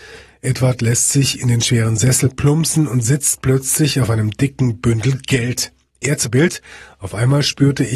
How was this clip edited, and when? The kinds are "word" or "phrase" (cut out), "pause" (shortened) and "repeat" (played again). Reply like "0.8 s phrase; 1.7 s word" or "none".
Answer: none